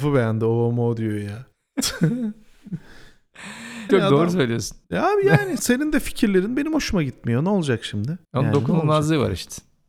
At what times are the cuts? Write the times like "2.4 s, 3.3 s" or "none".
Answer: 1.5 s, 3.9 s, 4.8 s, 5.6 s, 8.2 s